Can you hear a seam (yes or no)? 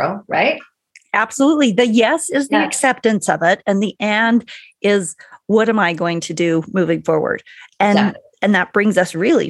no